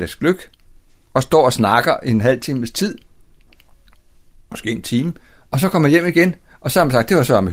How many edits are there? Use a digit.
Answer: 0